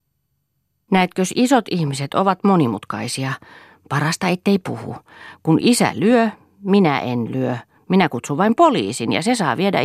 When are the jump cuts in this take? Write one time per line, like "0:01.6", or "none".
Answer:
none